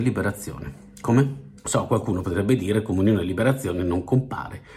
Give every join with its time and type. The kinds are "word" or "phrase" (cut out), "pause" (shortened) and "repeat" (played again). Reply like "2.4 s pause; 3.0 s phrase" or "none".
1.6 s pause